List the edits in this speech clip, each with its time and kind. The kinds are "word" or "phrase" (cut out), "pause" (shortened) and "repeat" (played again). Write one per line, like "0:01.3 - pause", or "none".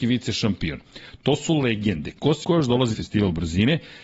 0:02.4 - word
0:02.9 - word